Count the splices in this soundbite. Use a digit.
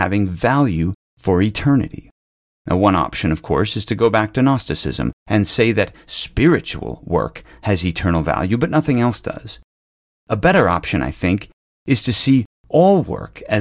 0